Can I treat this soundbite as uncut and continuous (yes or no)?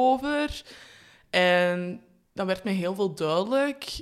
yes